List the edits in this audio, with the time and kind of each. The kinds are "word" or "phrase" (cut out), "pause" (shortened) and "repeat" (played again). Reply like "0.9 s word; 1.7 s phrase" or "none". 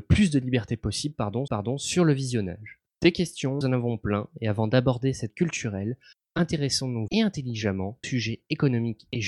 1.5 s repeat; 2.9 s pause; 3.6 s word; 5.3 s word; 7.1 s word; 8.0 s word